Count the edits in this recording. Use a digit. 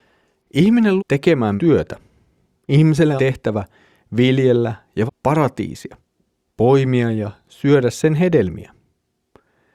4